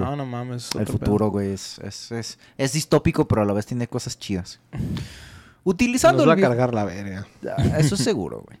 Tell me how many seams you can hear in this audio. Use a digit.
0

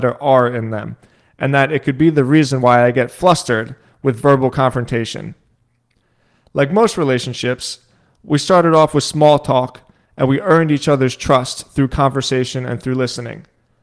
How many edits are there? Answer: 0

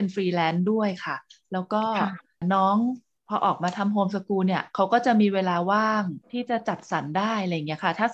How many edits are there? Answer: 1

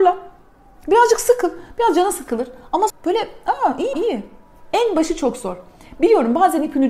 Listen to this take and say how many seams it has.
2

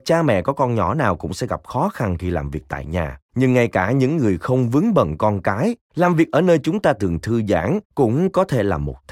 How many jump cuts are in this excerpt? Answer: 3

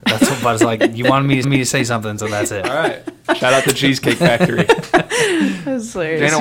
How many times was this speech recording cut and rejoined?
1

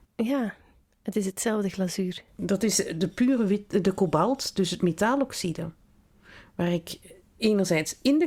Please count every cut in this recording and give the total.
0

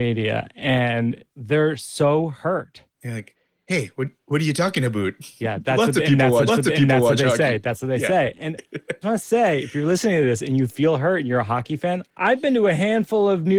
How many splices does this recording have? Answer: 4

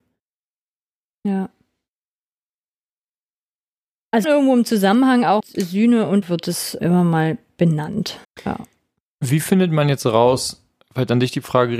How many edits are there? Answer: 5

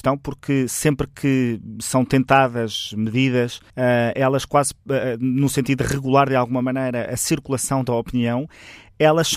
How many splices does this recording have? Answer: 1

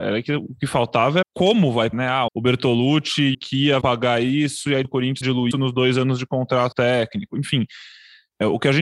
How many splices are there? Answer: 9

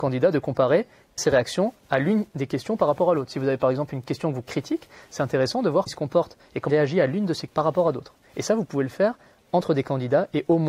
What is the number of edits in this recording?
5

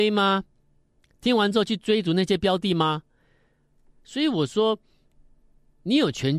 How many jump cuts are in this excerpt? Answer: 0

